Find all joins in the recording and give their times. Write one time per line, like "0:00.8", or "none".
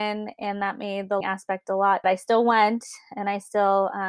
0:01.2
0:02.0